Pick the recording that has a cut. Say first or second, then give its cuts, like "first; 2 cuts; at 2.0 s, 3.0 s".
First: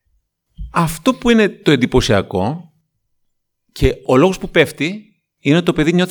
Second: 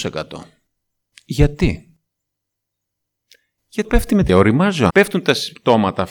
second; 3 cuts; at 3.8 s, 4.3 s, 4.9 s